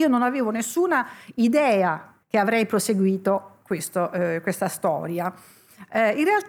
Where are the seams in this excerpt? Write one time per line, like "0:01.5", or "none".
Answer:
0:02.2